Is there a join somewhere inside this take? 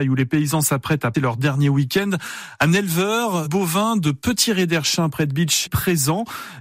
yes; 3 cuts; at 1.1 s, 3.5 s, 5.7 s

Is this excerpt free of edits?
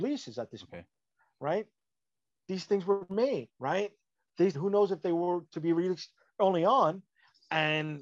no; 3 cuts; at 2.3 s, 3.5 s, 4.5 s

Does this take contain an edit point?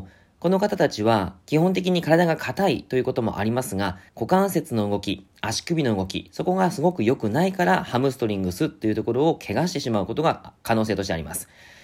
yes; 1 cut; at 4.1 s

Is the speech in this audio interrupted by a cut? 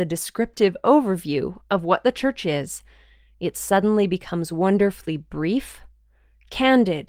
no; 0 cuts

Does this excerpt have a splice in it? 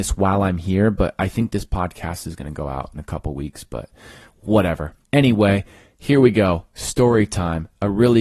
yes; 1 cut; at 5.0 s

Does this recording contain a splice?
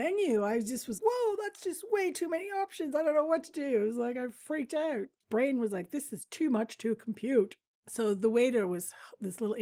yes; 1 cut; at 1.0 s

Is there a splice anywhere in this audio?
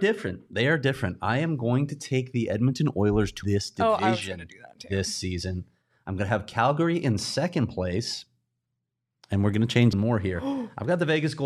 yes; 2 cuts; at 3.4 s, 9.9 s

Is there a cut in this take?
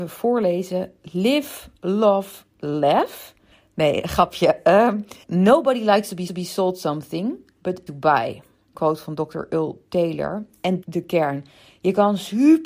yes; 6 cuts; at 3.5 s, 5.2 s, 6.3 s, 7.9 s, 8.7 s, 10.8 s

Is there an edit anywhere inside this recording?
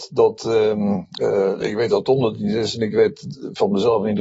no; 0 cuts

